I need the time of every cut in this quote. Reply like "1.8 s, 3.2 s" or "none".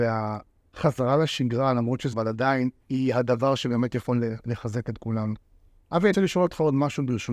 2.1 s, 2.8 s, 5.7 s, 6.1 s